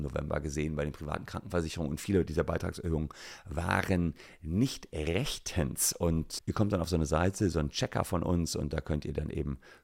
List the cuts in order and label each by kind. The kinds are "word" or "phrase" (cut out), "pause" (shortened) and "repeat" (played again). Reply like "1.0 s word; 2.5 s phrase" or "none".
6.4 s word